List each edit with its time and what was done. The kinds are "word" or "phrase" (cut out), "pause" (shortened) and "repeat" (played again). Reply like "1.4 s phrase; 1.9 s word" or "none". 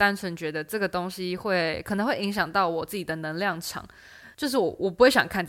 4.3 s pause